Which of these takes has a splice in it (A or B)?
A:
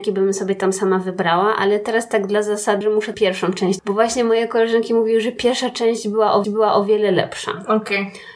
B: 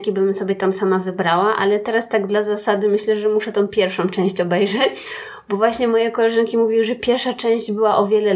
A